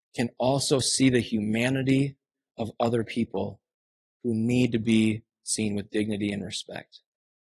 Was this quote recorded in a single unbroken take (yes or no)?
yes